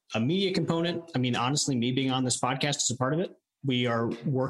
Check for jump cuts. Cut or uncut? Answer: uncut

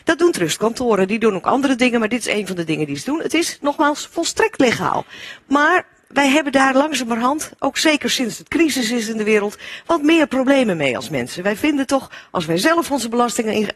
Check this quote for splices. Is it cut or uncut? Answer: uncut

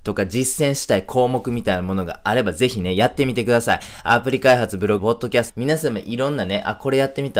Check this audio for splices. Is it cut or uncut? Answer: cut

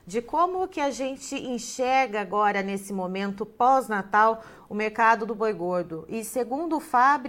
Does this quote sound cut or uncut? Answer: uncut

